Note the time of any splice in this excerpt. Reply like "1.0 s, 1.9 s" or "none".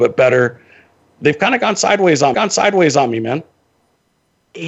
2.3 s